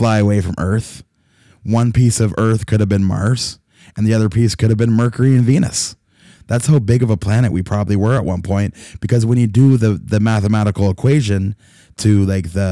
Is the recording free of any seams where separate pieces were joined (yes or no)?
yes